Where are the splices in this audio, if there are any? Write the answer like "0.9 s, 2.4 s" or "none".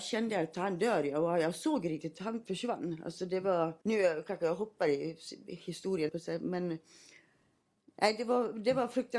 3.8 s, 6.1 s